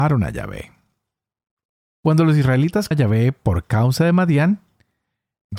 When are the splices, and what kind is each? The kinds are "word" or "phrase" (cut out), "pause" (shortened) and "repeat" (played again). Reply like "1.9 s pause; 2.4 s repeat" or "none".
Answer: 2.9 s word